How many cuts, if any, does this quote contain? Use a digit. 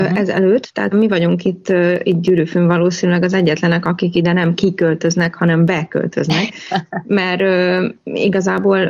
1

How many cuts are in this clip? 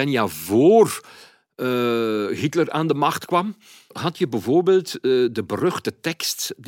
0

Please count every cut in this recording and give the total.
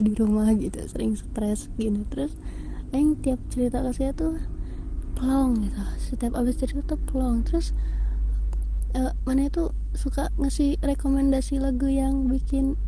0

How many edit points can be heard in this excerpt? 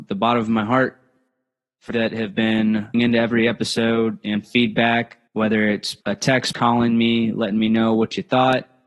6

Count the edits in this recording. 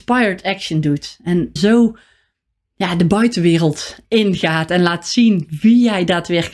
1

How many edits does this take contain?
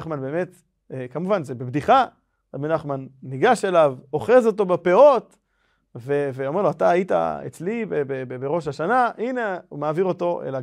0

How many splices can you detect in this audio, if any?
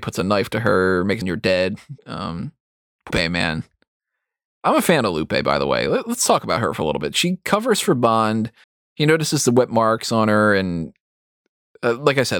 4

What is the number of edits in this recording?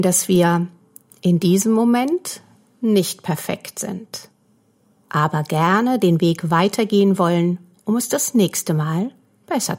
0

